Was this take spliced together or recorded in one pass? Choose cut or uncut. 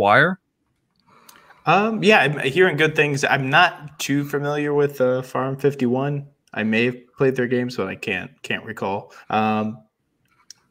cut